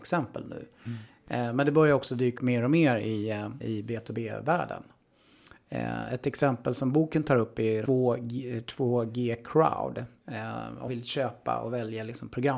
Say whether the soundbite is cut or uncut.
cut